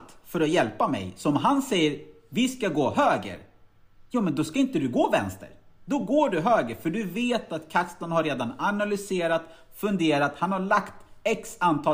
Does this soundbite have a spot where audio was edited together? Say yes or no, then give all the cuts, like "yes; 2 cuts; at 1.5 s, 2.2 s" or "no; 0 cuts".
no; 0 cuts